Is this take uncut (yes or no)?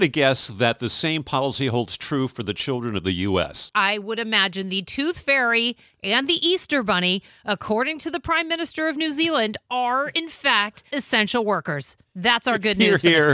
yes